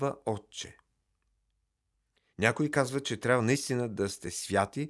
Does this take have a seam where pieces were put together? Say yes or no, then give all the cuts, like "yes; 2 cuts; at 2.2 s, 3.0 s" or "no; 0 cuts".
no; 0 cuts